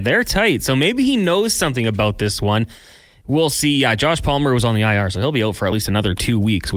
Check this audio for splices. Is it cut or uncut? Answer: uncut